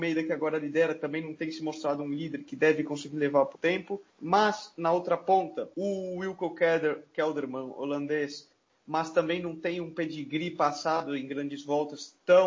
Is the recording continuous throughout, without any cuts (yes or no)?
no